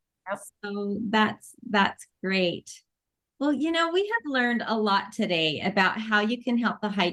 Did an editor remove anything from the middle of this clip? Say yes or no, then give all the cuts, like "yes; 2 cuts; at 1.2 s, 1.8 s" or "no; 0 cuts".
no; 0 cuts